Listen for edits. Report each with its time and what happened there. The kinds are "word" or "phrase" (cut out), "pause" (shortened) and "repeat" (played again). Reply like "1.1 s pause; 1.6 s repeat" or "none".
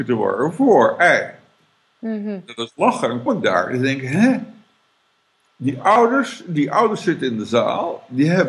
3.3 s word